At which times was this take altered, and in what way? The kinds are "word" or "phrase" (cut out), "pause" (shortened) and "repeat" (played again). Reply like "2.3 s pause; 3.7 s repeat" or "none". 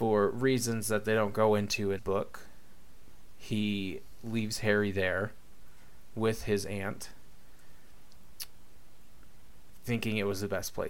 2.0 s word